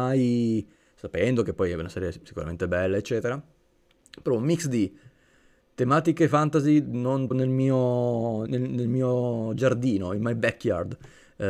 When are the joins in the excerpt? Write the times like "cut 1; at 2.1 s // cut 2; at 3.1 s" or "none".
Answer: cut 1; at 7.3 s // cut 2; at 8.5 s